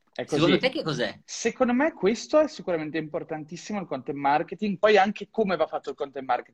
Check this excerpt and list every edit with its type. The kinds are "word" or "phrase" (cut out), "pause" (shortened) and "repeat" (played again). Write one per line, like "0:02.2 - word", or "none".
0:01.2 - pause